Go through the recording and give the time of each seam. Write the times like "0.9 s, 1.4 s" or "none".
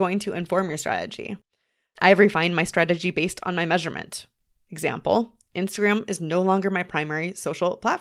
none

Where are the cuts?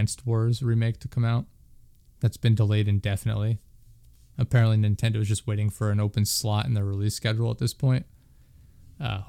none

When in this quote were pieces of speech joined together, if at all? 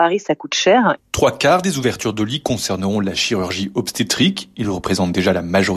none

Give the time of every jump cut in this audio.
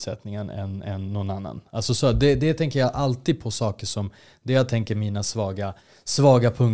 none

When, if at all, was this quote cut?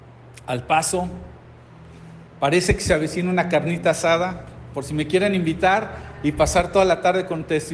none

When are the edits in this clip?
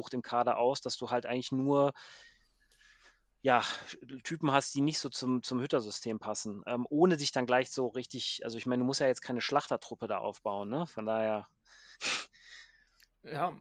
none

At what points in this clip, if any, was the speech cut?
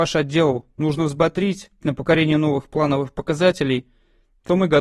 1.8 s

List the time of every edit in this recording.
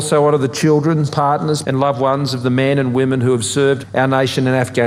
1.1 s, 1.6 s

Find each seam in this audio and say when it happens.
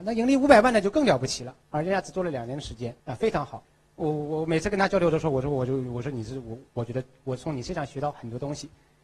1.6 s, 3.0 s

